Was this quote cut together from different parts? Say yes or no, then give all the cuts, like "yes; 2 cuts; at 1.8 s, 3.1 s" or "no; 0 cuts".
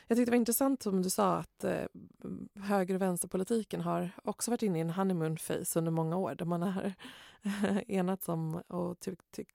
no; 0 cuts